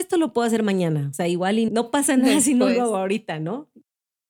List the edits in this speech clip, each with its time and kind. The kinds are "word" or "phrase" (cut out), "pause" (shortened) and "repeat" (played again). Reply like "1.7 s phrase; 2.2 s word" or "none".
1.7 s word

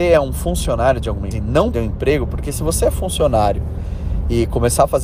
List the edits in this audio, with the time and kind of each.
1.3 s word; 1.7 s word

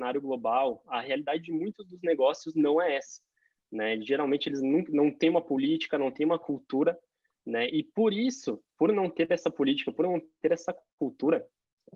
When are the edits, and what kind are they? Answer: none

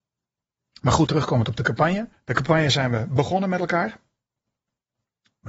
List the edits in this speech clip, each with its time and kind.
1.1 s word; 2.1 s pause

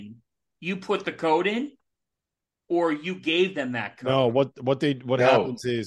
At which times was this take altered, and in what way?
none

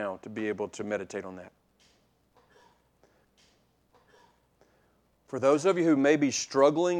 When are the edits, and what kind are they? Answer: none

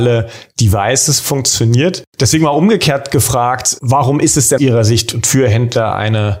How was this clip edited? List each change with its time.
4.6 s phrase

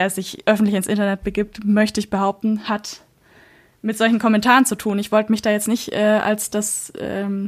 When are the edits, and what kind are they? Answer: none

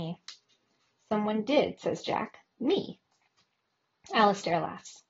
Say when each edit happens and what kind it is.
none

